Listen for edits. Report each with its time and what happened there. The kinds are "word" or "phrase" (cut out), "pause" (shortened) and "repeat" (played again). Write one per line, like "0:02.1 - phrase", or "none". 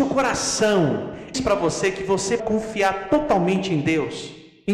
0:01.3 - phrase
0:02.4 - word